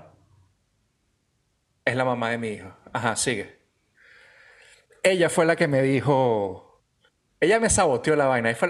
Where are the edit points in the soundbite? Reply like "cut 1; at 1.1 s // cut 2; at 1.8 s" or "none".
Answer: none